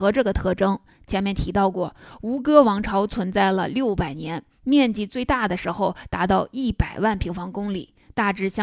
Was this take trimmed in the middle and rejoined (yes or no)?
no